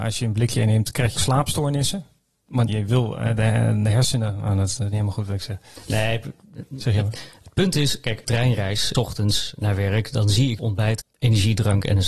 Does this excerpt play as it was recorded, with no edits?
no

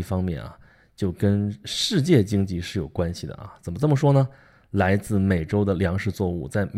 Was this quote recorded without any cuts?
yes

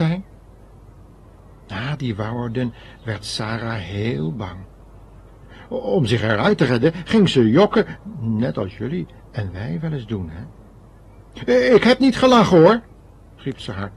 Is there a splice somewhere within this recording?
no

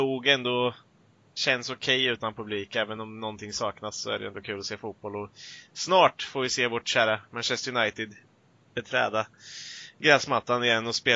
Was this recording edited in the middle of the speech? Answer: no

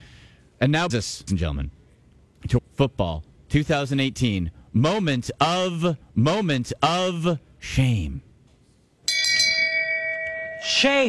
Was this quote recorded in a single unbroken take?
no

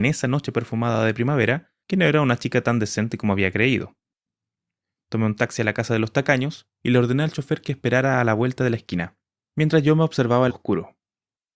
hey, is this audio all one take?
no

